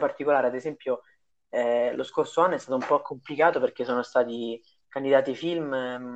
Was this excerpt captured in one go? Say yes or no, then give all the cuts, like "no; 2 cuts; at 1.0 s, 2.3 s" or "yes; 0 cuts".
yes; 0 cuts